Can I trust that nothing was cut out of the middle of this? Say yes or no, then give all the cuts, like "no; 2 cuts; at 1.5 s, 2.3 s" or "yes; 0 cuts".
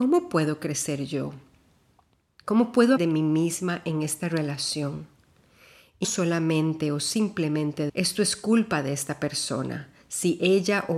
no; 3 cuts; at 3.0 s, 6.0 s, 7.9 s